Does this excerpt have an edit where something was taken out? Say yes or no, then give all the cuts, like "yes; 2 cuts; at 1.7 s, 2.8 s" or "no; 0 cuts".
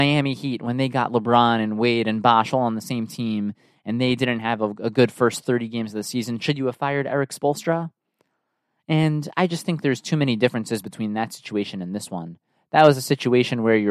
no; 0 cuts